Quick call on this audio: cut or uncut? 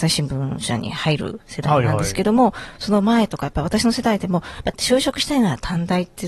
cut